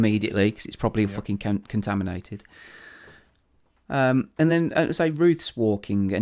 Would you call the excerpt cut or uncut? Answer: uncut